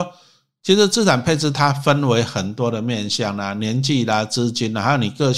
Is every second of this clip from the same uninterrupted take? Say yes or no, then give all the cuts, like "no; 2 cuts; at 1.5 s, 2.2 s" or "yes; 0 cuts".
yes; 0 cuts